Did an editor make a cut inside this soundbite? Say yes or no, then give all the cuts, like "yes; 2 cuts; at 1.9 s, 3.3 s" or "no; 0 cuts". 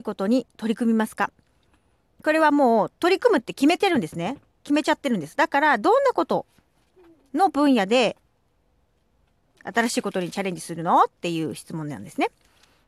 no; 0 cuts